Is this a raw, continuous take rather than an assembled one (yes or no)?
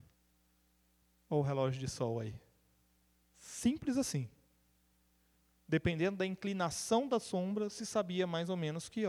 yes